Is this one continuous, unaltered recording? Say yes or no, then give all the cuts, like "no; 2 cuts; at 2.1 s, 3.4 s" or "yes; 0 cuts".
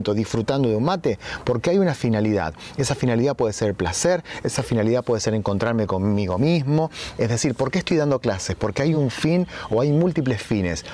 yes; 0 cuts